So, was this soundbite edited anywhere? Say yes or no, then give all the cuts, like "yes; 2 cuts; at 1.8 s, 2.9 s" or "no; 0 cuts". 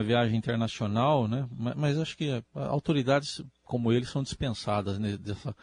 no; 0 cuts